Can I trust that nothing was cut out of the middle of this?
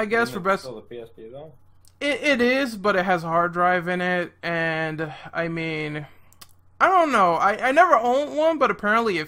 yes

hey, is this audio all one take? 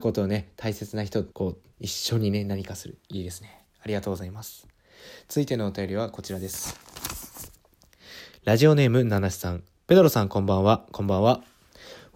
no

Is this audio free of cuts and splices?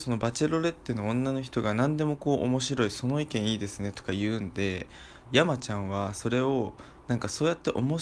no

